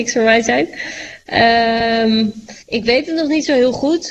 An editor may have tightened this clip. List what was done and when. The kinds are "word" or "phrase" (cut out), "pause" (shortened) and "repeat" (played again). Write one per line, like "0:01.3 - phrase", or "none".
0:02.6 - pause